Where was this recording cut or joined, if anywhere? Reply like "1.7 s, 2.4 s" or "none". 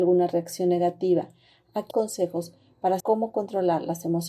1.9 s, 3.0 s